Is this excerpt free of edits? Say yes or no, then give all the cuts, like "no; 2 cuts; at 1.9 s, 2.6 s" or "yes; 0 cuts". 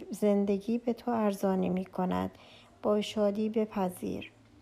yes; 0 cuts